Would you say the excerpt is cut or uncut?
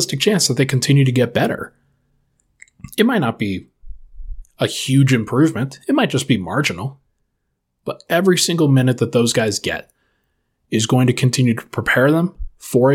uncut